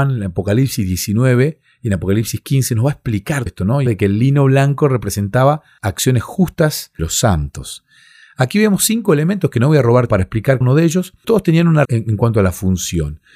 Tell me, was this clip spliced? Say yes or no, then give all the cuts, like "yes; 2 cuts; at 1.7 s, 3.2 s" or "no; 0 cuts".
yes; 8 cuts; at 3.5 s, 3.9 s, 5.8 s, 7.0 s, 10.1 s, 10.6 s, 11.2 s, 11.8 s